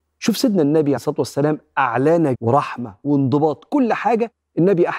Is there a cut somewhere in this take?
yes; 2 cuts; at 1.0 s, 2.3 s

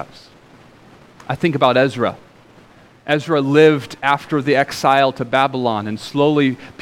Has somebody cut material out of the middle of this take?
no; 0 cuts

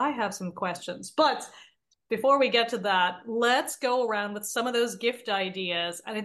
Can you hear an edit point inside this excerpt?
no; 0 cuts

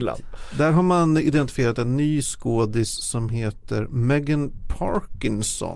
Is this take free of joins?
yes; 0 cuts

